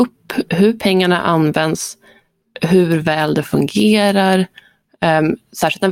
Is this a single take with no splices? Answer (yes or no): yes